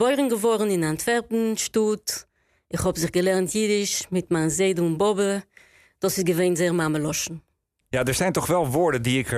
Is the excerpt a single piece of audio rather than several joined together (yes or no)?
yes